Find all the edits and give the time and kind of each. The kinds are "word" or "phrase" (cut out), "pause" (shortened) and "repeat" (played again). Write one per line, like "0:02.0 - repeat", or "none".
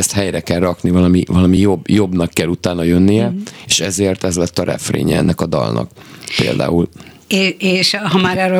none